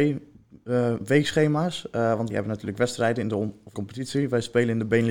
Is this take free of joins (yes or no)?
no